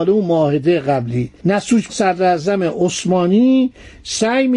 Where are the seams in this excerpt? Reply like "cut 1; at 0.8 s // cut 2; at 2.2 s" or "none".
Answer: cut 1; at 1.9 s